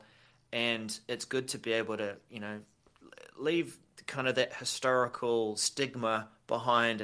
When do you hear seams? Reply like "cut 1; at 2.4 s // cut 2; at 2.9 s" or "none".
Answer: none